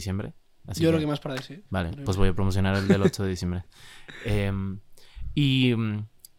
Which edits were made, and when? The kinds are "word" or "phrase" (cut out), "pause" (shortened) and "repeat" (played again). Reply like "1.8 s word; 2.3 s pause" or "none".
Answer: 1.7 s pause